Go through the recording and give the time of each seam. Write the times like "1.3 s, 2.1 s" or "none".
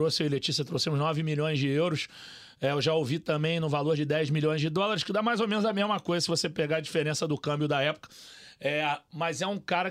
none